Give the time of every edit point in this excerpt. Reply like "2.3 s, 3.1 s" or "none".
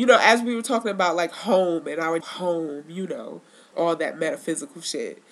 2.2 s